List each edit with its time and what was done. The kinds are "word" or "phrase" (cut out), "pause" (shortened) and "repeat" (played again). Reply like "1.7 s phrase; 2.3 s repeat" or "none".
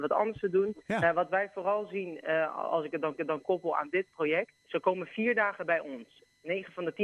3.2 s repeat; 4.6 s pause